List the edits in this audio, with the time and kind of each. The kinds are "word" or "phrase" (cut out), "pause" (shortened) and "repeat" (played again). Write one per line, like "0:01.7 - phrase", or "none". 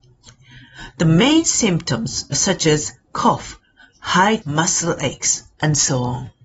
0:02.3 - word
0:04.4 - word